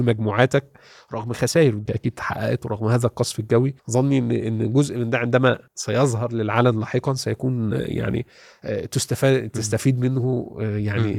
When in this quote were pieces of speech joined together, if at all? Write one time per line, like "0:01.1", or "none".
0:01.9
0:03.8
0:05.7